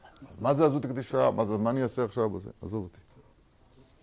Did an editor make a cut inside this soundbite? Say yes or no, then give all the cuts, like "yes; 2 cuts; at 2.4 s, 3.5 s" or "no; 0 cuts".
no; 0 cuts